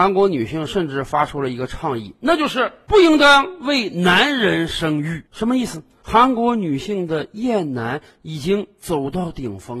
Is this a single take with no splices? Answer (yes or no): no